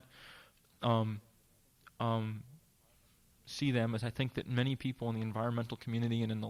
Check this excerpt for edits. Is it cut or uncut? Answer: uncut